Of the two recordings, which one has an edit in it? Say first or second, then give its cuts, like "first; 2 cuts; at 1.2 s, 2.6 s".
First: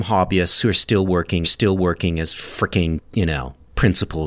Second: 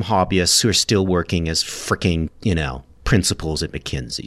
first; 1 cut; at 1.4 s